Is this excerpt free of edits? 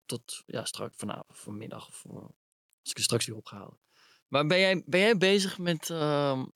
yes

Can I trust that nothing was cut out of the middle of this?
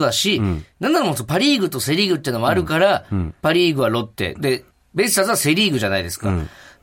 no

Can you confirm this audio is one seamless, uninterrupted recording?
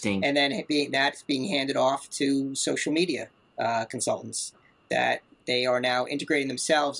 yes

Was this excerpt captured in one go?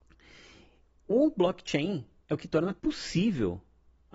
no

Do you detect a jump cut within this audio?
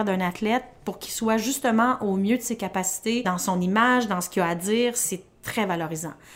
no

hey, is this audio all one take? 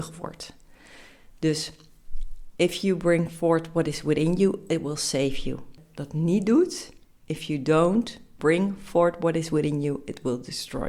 yes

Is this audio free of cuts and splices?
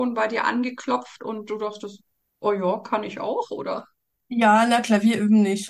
yes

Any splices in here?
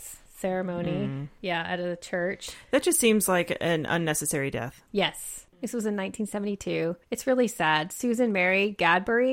no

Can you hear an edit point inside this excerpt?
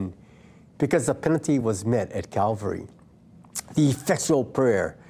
no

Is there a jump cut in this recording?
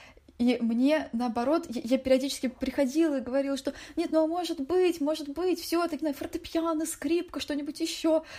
yes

